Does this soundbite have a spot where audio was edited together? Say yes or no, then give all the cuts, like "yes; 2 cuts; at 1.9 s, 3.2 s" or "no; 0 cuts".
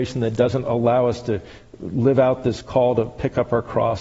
no; 0 cuts